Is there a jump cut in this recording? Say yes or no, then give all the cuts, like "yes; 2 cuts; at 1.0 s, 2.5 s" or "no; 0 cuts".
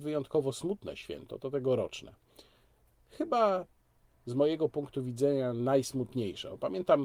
no; 0 cuts